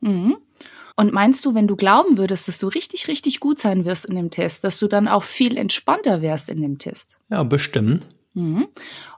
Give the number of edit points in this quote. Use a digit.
2